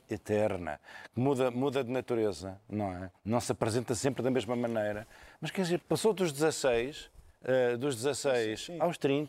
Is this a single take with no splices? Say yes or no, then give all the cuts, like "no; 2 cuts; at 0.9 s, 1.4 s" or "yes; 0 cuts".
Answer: no; 2 cuts; at 3.2 s, 5.8 s